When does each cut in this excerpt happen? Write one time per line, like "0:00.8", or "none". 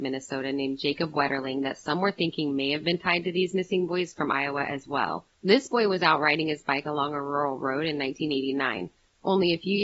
none